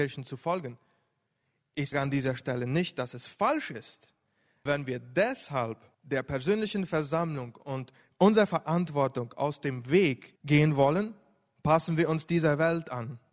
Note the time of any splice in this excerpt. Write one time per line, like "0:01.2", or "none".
0:01.9
0:04.7
0:05.9
0:10.4